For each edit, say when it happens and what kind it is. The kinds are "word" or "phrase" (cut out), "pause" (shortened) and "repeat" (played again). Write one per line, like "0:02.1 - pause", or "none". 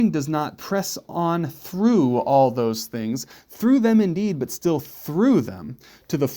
none

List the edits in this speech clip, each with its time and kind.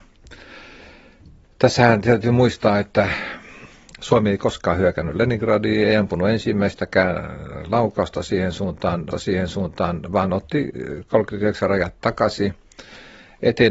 0:09.1 - repeat

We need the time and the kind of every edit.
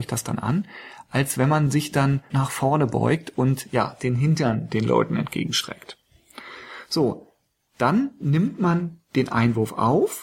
0:02.3 - word

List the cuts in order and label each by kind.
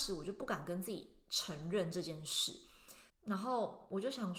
0:03.1 - pause

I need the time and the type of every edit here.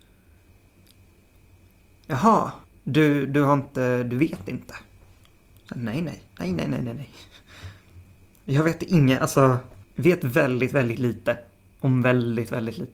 0:02.6 - pause
0:06.3 - pause
0:09.8 - pause

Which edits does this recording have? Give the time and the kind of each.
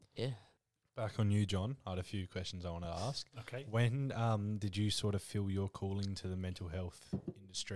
none

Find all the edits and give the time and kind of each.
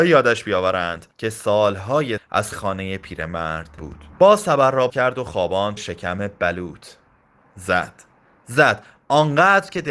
0:01.1 - pause
0:02.2 - word
0:02.5 - word
0:03.8 - word
0:04.1 - pause
0:04.9 - word
0:05.8 - word
0:07.4 - word

